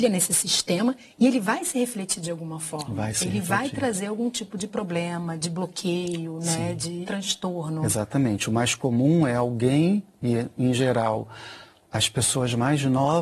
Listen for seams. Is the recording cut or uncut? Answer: cut